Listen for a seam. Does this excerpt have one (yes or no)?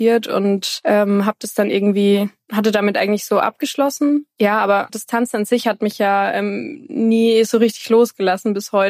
yes